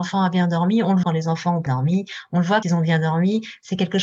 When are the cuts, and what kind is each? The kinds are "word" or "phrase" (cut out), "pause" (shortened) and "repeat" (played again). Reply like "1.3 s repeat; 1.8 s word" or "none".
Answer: 1.0 s word; 1.7 s word; 2.6 s word